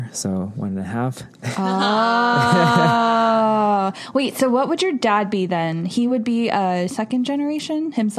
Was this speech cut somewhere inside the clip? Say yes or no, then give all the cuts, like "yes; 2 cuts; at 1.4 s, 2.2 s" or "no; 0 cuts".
no; 0 cuts